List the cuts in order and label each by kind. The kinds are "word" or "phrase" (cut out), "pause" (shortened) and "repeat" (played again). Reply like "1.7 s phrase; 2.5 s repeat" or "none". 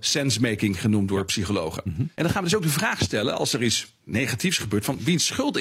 2.1 s pause